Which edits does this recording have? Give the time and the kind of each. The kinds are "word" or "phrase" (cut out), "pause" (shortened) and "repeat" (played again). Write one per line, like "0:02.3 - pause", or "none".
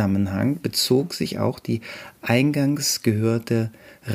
none